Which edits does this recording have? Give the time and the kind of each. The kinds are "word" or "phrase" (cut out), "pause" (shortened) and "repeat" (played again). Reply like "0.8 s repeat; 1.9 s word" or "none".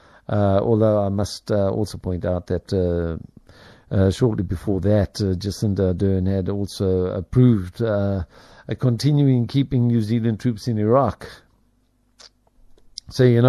none